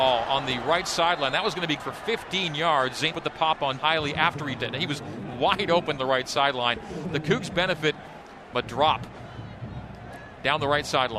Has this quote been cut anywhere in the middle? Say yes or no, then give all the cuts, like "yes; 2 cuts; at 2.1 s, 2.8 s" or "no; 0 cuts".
yes; 6 cuts; at 1.8 s, 3.1 s, 3.8 s, 4.6 s, 6.0 s, 8.5 s